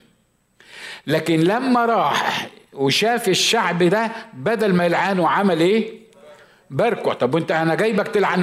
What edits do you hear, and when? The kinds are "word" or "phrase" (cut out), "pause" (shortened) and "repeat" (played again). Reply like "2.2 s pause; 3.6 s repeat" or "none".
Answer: none